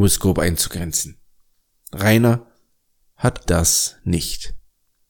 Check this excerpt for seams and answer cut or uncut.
cut